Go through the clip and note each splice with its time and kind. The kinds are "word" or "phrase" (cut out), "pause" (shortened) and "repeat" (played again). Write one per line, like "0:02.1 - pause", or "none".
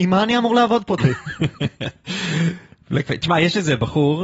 0:01.0 - word